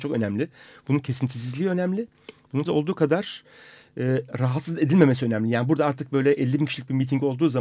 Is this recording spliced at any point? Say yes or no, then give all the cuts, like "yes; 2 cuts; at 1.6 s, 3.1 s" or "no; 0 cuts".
yes; 1 cut; at 2.7 s